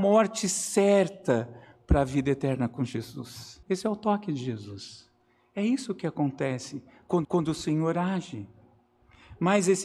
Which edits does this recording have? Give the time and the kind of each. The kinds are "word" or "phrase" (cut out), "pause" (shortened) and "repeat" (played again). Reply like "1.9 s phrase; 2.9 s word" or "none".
3.6 s pause; 7.2 s repeat